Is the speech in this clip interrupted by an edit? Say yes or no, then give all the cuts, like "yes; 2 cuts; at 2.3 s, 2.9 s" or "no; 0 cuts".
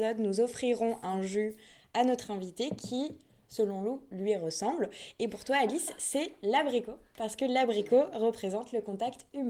no; 0 cuts